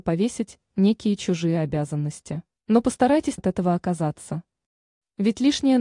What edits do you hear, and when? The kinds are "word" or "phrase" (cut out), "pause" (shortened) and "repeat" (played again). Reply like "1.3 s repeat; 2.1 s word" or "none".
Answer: 2.6 s pause; 3.4 s word